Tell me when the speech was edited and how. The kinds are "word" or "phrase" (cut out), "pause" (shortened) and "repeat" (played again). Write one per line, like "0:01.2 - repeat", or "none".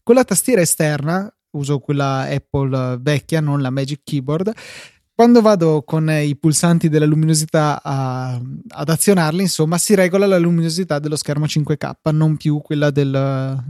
none

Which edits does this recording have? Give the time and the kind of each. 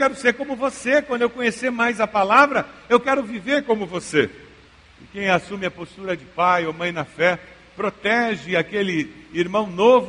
none

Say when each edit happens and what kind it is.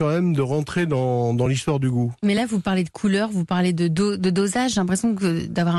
none

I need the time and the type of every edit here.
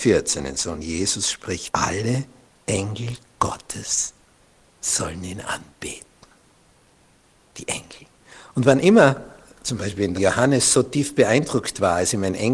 0:01.7 - word
0:10.2 - word

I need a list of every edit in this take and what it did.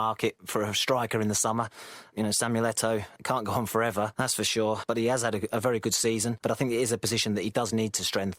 none

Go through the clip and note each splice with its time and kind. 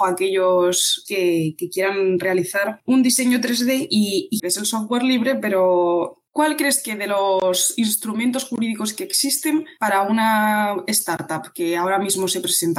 0:01.0 - word
0:04.4 - phrase
0:06.3 - pause

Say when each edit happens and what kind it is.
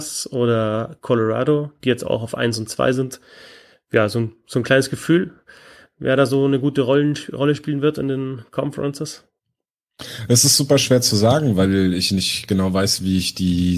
none

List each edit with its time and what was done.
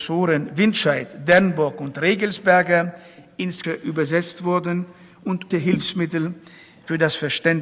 0:03.6 - word
0:05.5 - word

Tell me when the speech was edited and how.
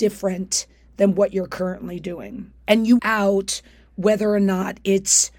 0:02.6 - pause
0:03.0 - phrase

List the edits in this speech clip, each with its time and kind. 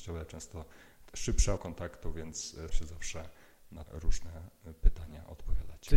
0:01.1 - word
0:01.6 - word
0:02.7 - word
0:03.9 - word

